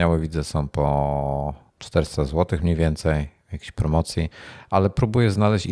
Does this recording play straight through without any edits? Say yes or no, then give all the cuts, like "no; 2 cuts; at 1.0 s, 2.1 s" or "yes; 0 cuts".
no; 1 cut; at 1.7 s